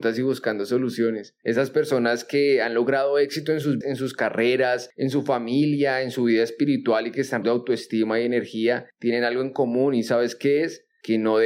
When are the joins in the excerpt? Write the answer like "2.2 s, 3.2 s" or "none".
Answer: 3.8 s, 7.4 s